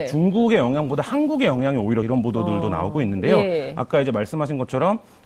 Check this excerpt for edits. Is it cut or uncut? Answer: cut